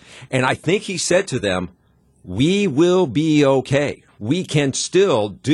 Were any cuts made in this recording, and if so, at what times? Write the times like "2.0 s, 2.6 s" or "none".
4.1 s